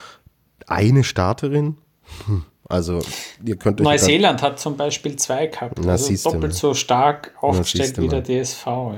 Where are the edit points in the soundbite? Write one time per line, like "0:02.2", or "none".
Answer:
none